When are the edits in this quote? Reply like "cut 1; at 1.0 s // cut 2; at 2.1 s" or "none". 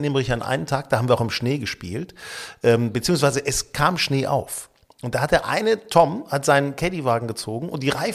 none

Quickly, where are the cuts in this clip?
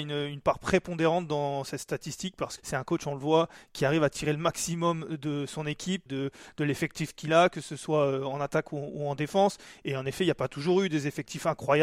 cut 1; at 2.6 s // cut 2; at 6.1 s

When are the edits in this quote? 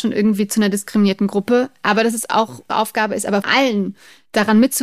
cut 1; at 2.7 s // cut 2; at 3.4 s

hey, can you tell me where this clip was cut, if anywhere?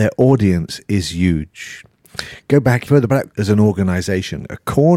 cut 1; at 2.9 s // cut 2; at 3.3 s

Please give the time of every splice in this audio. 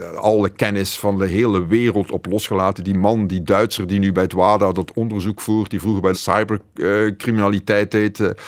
cut 1; at 6.1 s

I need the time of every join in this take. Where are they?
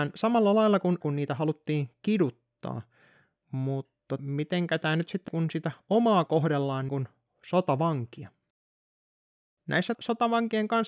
cut 1; at 1.0 s // cut 2; at 4.2 s // cut 3; at 5.3 s // cut 4; at 6.3 s // cut 5; at 6.9 s // cut 6; at 9.9 s

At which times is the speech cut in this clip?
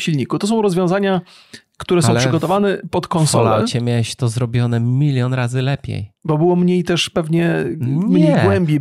none

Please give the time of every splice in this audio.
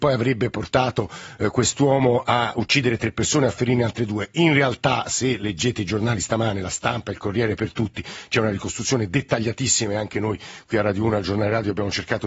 none

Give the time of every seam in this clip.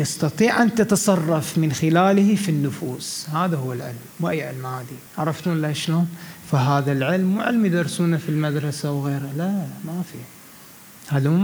cut 1; at 4.1 s // cut 2; at 5.1 s

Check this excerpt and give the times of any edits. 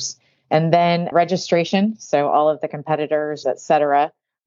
cut 1; at 1.1 s // cut 2; at 3.4 s

